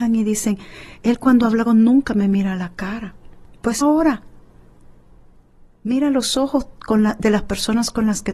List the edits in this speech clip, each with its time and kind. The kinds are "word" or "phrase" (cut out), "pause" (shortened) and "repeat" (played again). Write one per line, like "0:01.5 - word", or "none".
0:01.7 - word
0:03.8 - word